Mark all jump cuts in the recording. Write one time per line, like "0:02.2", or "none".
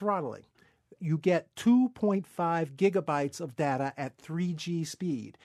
0:01.0